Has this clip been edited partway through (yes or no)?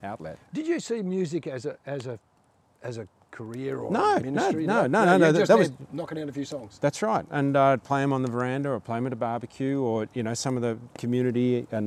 no